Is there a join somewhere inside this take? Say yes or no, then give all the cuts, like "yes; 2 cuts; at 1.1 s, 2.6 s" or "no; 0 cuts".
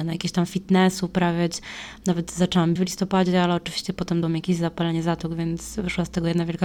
yes; 2 cuts; at 2.8 s, 4.2 s